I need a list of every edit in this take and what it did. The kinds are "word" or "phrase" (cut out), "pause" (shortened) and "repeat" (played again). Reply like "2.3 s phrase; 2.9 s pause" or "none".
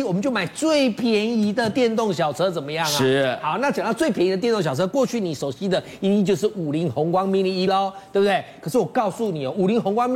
7.7 s word